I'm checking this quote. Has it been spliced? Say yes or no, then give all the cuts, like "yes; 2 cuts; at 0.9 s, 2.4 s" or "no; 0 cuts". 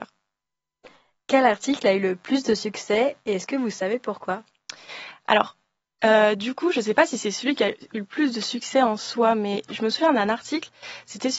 no; 0 cuts